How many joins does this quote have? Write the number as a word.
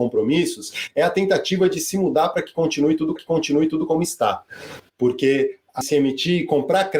two